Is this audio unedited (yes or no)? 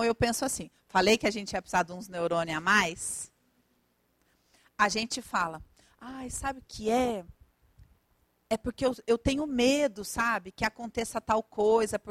no